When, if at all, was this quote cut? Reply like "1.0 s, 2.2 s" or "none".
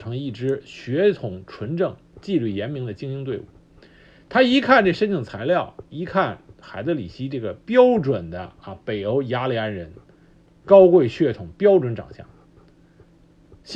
none